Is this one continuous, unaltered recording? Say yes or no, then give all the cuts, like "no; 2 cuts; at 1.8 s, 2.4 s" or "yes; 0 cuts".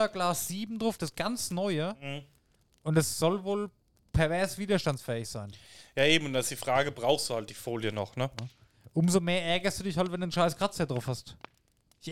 yes; 0 cuts